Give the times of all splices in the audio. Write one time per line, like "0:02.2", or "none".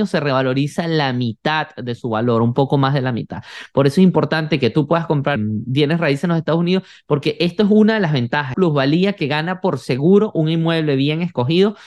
0:05.4
0:08.5